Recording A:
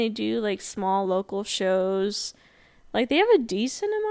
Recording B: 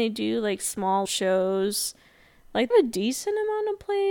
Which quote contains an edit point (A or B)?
B